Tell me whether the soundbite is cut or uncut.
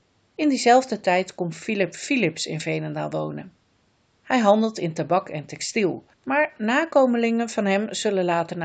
cut